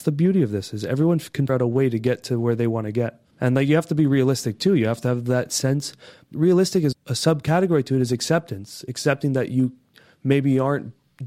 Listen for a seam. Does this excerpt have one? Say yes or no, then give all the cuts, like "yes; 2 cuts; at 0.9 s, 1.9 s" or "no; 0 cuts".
yes; 4 cuts; at 1.5 s, 3.3 s, 6.3 s, 6.9 s